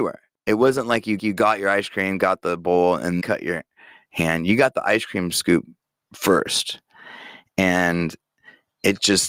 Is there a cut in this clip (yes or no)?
yes